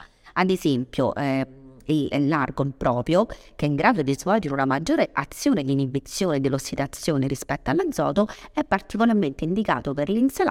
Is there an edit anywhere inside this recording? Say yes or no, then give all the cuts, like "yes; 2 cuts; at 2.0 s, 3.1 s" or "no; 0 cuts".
no; 0 cuts